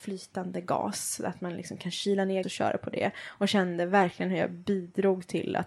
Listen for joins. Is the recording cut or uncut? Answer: cut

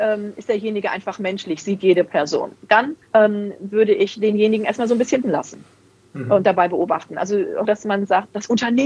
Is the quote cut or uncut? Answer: cut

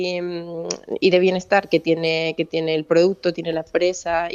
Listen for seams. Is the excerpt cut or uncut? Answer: uncut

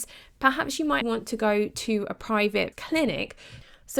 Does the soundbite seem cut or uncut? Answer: cut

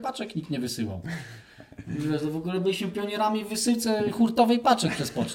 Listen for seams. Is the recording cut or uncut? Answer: uncut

